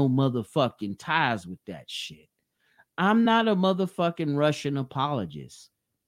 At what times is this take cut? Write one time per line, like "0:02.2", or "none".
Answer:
none